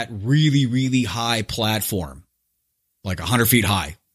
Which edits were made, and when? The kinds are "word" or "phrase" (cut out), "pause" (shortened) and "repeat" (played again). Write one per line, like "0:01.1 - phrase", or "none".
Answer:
none